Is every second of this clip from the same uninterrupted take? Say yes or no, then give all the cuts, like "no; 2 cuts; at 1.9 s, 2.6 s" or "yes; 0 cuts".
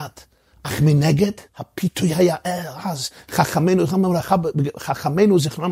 no; 1 cut; at 1.5 s